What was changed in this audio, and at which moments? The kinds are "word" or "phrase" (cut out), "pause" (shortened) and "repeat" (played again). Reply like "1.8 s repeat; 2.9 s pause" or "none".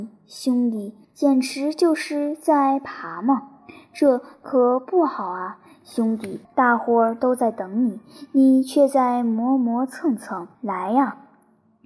1.0 s pause; 6.4 s pause; 10.5 s pause